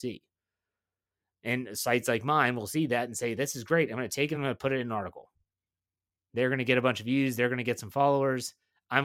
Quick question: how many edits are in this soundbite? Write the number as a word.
zero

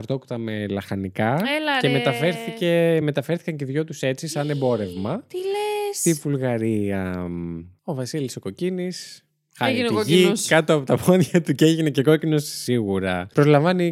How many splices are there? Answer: zero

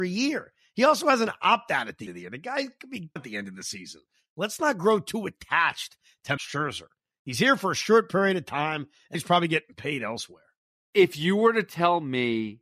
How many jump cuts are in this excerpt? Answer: four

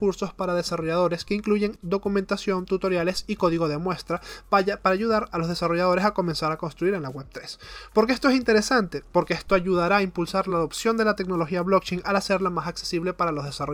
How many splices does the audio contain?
zero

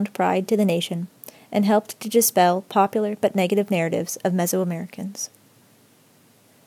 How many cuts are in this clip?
zero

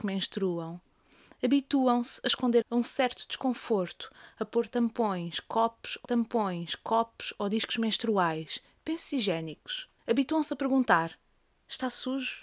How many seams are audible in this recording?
three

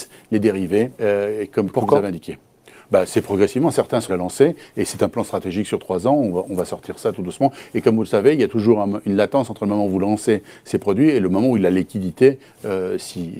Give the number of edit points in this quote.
two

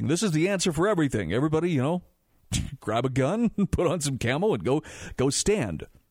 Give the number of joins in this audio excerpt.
zero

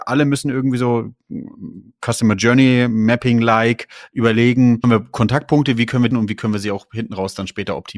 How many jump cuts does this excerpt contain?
two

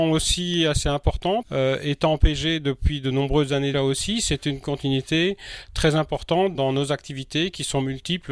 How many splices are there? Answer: three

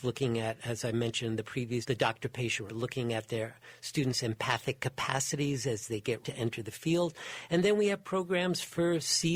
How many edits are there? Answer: three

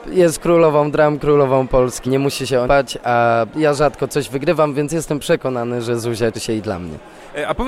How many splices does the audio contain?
three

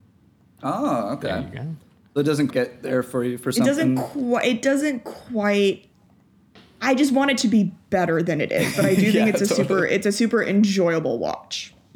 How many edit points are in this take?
one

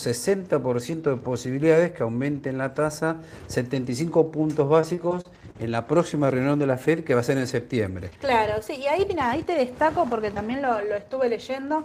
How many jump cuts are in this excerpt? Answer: one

